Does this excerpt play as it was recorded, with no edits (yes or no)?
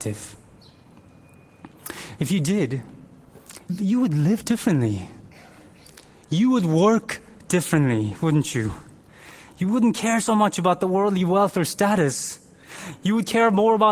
no